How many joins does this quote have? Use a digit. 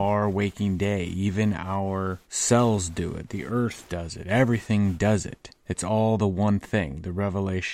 2